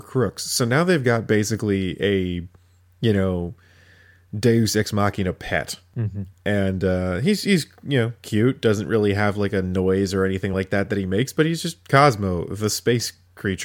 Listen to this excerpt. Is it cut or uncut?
uncut